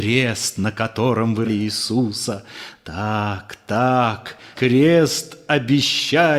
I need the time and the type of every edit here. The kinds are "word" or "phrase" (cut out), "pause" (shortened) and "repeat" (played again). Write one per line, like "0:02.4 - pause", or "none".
0:01.4 - word
0:04.5 - word